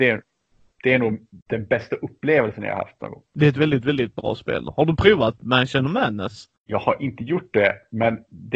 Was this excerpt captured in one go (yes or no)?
no